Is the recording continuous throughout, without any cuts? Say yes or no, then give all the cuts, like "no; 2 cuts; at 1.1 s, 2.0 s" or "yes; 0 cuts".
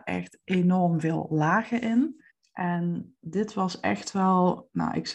no; 1 cut; at 2.3 s